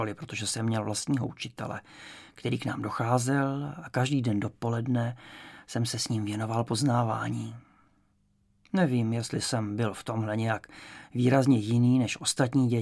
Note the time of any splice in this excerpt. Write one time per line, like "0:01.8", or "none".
none